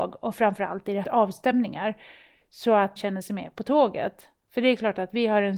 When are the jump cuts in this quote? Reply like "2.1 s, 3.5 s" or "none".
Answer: 1.0 s, 3.0 s